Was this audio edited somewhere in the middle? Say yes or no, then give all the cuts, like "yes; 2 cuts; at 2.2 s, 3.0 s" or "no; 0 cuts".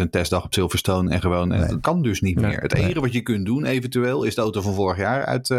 yes; 1 cut; at 1.8 s